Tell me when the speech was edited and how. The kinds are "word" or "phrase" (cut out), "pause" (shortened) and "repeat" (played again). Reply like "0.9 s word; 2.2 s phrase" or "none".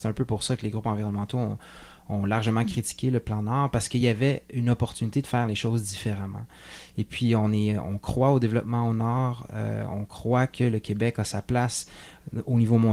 none